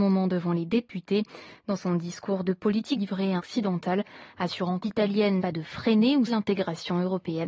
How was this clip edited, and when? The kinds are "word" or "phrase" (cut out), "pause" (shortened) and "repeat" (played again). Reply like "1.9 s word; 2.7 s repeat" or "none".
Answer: 3.0 s phrase; 3.4 s phrase; 4.8 s word; 5.4 s word; 6.3 s word